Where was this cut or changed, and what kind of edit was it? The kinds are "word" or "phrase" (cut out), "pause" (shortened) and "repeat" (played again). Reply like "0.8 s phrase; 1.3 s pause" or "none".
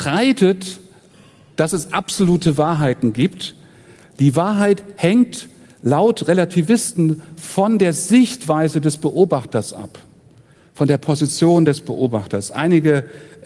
none